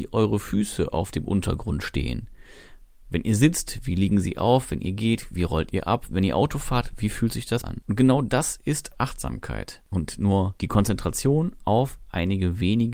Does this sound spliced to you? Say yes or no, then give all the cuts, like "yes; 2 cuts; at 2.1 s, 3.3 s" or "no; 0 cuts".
yes; 1 cut; at 7.6 s